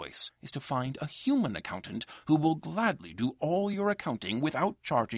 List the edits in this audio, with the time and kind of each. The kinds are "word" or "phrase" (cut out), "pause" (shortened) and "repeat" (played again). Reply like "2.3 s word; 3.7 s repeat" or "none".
none